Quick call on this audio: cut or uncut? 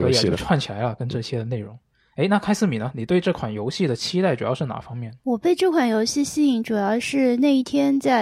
uncut